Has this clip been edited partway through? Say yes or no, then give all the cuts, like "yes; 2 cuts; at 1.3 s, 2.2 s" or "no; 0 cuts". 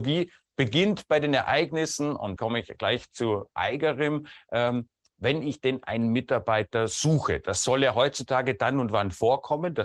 yes; 1 cut; at 2.4 s